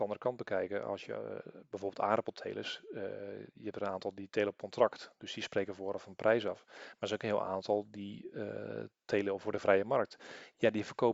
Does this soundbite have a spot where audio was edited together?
no; 0 cuts

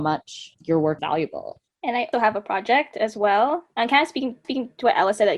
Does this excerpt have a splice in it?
yes; 4 cuts; at 1.0 s, 1.7 s, 2.1 s, 4.4 s

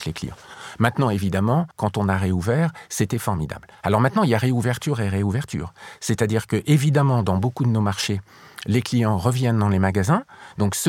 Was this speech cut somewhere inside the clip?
yes; 1 cut; at 1.7 s

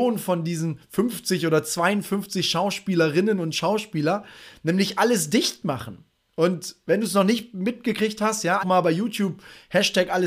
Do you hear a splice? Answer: yes; 2 cuts; at 6.2 s, 8.6 s

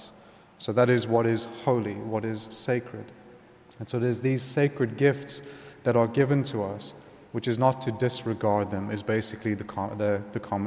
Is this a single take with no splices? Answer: yes; 0 cuts

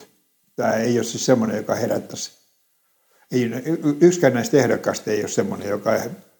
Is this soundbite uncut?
yes; 0 cuts

